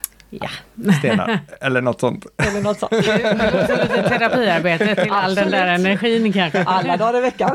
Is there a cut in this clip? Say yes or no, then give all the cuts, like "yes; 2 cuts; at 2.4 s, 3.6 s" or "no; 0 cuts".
no; 0 cuts